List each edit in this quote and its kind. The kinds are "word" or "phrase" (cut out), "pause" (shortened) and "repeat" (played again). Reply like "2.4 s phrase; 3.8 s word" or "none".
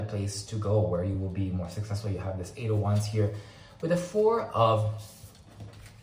none